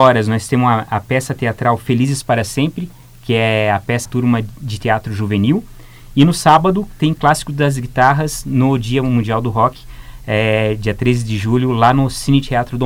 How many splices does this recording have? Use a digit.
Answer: 1